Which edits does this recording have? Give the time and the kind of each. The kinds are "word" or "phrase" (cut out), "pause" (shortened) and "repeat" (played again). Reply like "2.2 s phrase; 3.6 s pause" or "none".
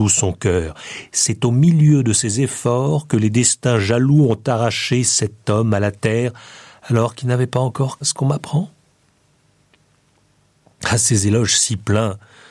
8.0 s phrase